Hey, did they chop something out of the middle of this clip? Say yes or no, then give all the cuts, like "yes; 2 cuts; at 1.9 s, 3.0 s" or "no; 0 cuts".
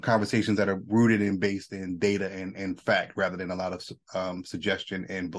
no; 0 cuts